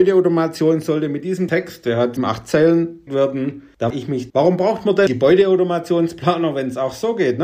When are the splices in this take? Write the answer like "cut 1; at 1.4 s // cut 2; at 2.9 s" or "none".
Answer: cut 1; at 1.5 s // cut 2; at 2.2 s // cut 3; at 3.1 s // cut 4; at 3.9 s // cut 5; at 4.3 s // cut 6; at 5.1 s